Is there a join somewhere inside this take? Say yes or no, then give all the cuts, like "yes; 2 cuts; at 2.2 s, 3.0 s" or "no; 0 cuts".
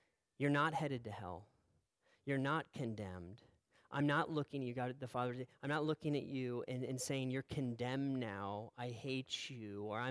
no; 0 cuts